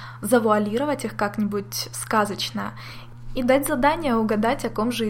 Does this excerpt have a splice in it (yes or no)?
no